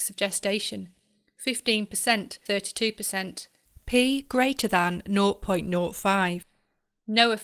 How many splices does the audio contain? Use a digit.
1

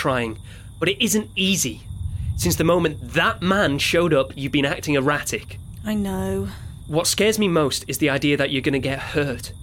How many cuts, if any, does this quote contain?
0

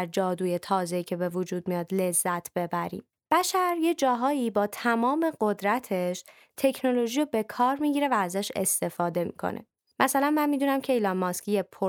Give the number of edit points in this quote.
0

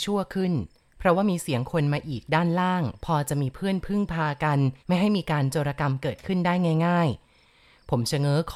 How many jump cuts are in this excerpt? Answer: 1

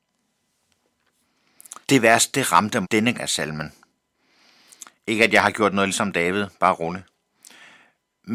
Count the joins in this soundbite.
4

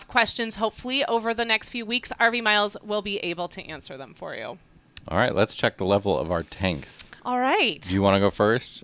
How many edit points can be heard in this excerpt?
1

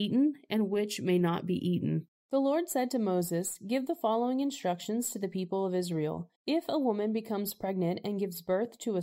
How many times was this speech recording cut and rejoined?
1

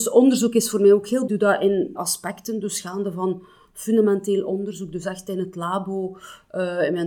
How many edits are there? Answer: 2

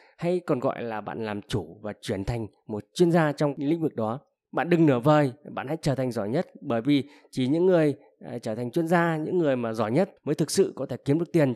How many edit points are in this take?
2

